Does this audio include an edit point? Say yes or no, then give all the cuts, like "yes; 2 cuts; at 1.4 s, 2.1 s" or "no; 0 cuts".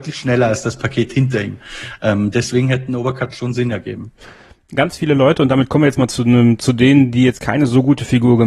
no; 0 cuts